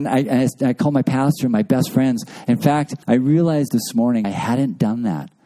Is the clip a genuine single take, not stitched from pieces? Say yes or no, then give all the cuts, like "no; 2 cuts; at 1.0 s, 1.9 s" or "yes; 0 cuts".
no; 3 cuts; at 3.0 s, 3.7 s, 4.2 s